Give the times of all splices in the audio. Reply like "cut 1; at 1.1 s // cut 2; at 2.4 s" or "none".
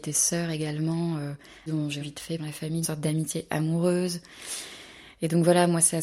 cut 1; at 1.7 s // cut 2; at 2.0 s // cut 3; at 2.4 s // cut 4; at 2.8 s